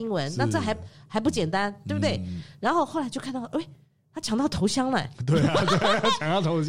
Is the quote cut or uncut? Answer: uncut